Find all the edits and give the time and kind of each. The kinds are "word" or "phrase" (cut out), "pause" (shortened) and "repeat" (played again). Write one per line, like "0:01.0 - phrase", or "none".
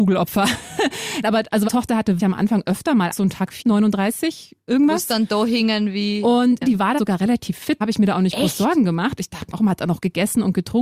0:01.2 - word
0:01.7 - word
0:02.2 - word
0:03.1 - word
0:03.6 - word
0:06.6 - word
0:07.0 - word
0:07.8 - word
0:09.5 - word